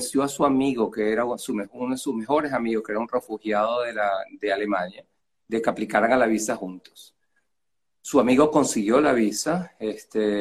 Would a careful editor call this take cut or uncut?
uncut